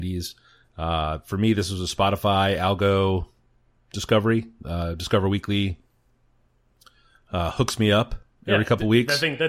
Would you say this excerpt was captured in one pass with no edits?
yes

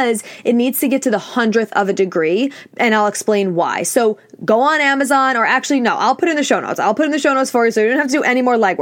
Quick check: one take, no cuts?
yes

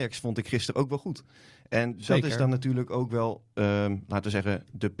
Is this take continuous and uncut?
yes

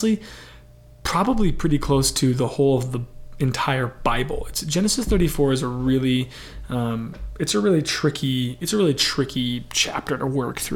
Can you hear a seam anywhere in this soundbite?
no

